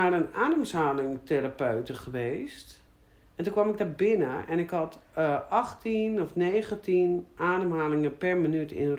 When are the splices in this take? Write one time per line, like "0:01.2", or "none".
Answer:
none